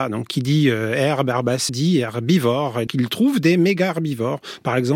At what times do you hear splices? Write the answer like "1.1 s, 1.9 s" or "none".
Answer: 1.7 s, 2.9 s